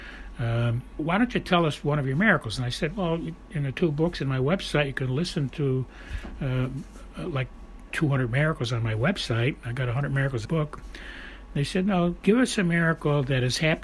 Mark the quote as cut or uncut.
cut